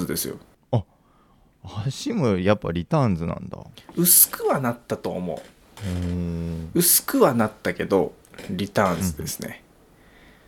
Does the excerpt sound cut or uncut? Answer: cut